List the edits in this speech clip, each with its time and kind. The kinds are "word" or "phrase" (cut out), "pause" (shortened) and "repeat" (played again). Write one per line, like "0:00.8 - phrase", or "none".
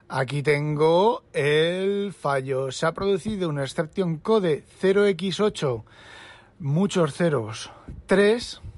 none